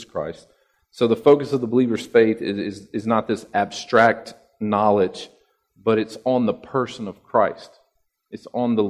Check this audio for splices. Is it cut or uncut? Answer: uncut